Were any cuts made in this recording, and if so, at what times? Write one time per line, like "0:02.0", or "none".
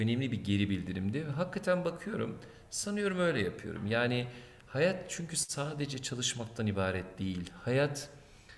none